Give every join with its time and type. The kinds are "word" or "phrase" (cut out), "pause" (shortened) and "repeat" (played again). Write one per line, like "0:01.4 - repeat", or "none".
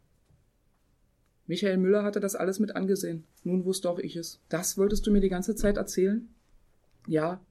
0:03.3 - pause
0:04.4 - pause